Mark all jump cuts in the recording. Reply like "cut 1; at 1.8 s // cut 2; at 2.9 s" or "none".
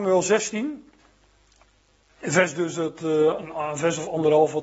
none